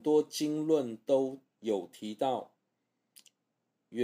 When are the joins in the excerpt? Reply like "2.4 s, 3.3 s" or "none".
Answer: 1.5 s